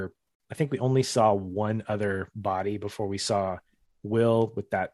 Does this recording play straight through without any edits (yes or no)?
yes